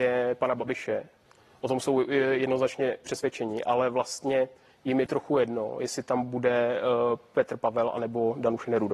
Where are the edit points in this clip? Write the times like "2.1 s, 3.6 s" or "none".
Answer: 5.1 s